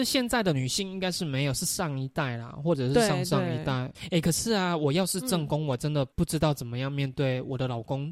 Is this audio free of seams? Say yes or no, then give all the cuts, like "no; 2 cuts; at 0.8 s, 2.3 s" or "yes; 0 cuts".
yes; 0 cuts